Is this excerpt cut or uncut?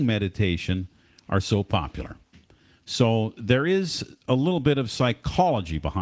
uncut